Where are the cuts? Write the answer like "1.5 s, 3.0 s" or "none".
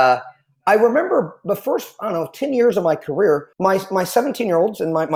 3.5 s

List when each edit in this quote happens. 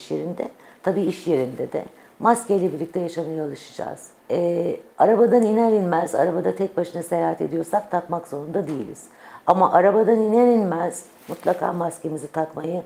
4.2 s

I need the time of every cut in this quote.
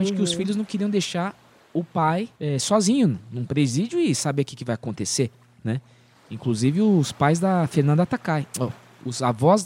2.3 s

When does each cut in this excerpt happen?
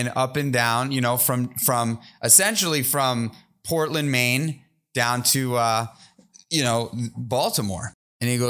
none

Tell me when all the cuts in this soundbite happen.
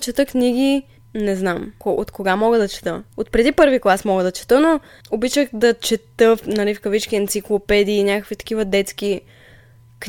1.8 s, 3.1 s

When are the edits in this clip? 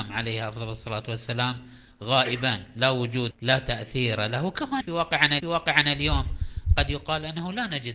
3.3 s, 4.8 s, 5.4 s

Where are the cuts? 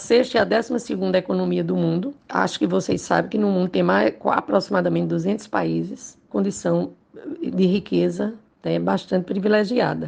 2.2 s, 6.3 s

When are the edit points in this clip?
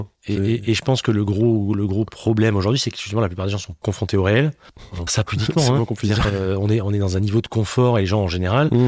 3.8 s, 5.1 s, 6.2 s

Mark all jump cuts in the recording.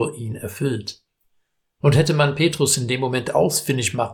none

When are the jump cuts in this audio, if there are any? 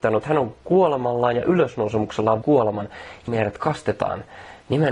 2.4 s, 3.3 s

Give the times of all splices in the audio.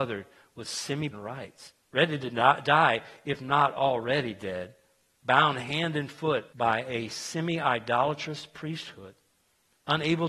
1.1 s, 1.8 s, 6.5 s

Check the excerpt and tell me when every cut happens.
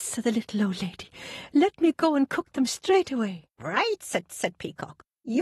3.5 s, 4.3 s

